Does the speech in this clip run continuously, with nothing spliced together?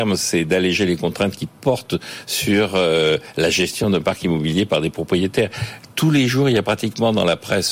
yes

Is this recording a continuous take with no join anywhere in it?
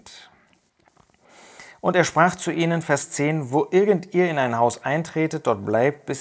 yes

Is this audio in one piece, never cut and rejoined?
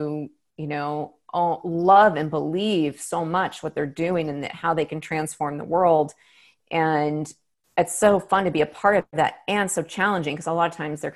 yes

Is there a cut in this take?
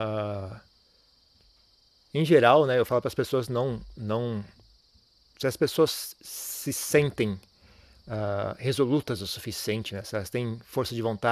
no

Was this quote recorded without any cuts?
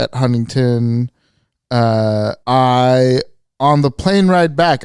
no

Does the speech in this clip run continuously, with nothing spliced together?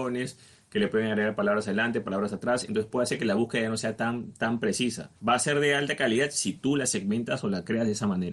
no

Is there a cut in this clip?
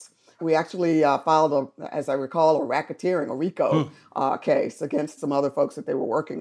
yes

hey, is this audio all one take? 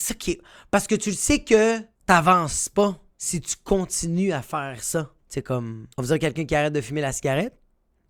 no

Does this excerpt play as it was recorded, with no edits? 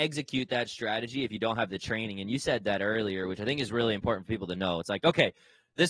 yes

